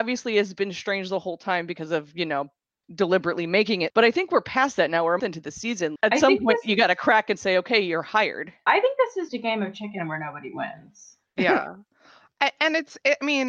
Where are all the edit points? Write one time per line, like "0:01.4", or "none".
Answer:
0:02.8
0:03.9
0:05.2
0:06.0
0:08.7
0:09.3